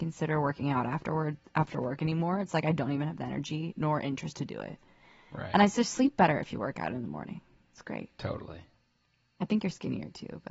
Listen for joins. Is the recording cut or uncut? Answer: uncut